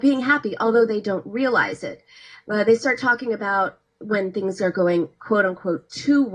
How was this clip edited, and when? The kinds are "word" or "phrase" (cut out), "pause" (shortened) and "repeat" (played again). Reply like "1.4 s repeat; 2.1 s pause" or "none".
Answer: none